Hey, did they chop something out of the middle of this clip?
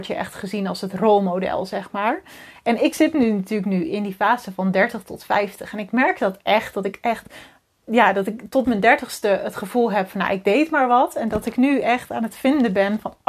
no; 0 cuts

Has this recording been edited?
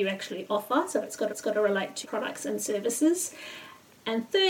yes; 2 cuts; at 1.3 s, 2.0 s

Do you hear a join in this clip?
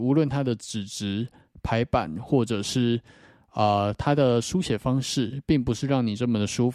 no; 0 cuts

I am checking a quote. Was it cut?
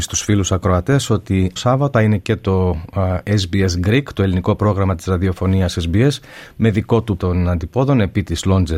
yes; 3 cuts; at 1.6 s, 1.9 s, 7.2 s

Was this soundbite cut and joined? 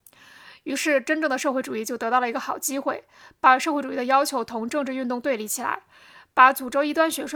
no; 0 cuts

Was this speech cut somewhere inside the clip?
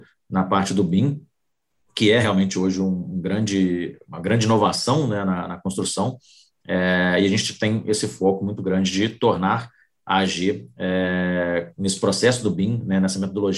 no; 0 cuts

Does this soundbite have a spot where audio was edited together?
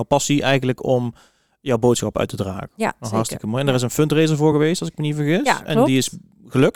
no; 0 cuts

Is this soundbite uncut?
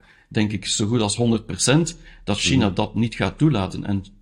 yes; 0 cuts

